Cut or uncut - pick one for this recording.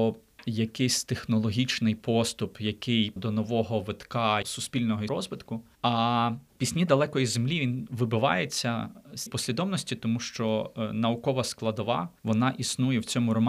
cut